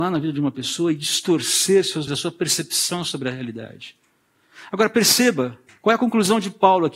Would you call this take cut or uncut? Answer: cut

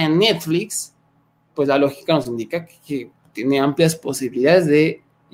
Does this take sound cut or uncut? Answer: uncut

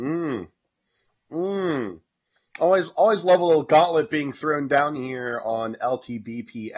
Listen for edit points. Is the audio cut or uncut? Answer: uncut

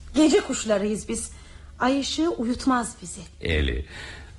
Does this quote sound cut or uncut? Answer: uncut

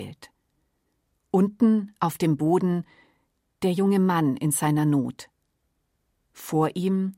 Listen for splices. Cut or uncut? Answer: uncut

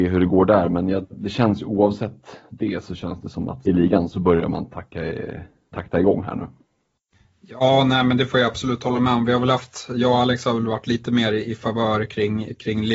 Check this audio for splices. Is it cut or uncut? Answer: cut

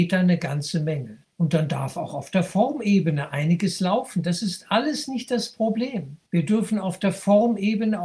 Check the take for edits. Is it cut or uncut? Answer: cut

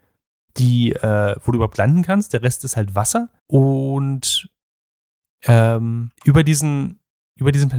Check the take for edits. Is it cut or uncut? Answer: cut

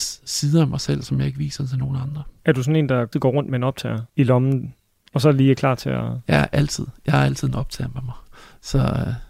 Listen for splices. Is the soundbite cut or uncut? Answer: cut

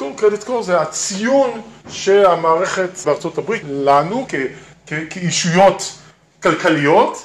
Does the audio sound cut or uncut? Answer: cut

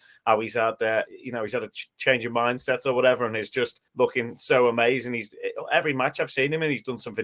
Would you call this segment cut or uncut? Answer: cut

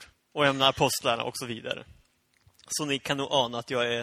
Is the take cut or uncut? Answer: uncut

